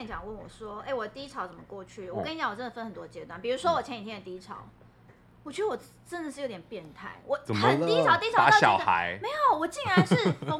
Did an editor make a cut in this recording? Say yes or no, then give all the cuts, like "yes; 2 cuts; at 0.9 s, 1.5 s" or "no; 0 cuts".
no; 0 cuts